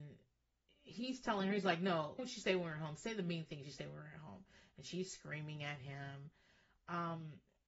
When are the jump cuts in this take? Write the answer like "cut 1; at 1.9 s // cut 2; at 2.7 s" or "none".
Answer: cut 1; at 2.2 s